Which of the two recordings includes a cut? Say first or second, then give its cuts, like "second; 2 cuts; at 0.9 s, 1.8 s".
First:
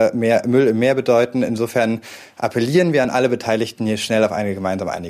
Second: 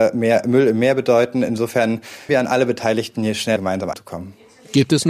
second; 3 cuts; at 2.3 s, 3.6 s, 3.9 s